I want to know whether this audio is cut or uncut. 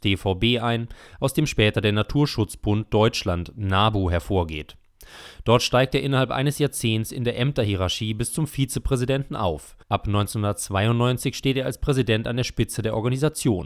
cut